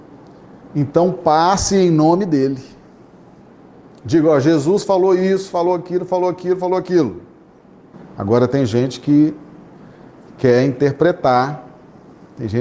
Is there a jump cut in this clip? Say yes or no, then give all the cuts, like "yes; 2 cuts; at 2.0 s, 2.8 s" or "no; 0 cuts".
no; 0 cuts